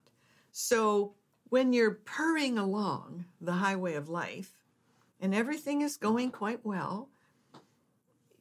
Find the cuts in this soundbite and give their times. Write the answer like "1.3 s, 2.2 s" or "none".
none